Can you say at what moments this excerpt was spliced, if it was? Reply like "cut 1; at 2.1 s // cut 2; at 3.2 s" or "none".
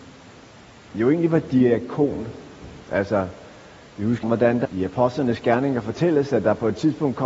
cut 1; at 2.8 s // cut 2; at 4.2 s // cut 3; at 4.6 s